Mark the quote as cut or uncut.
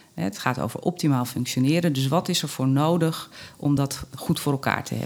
uncut